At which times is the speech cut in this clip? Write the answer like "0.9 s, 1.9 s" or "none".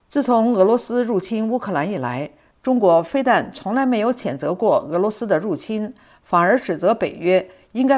none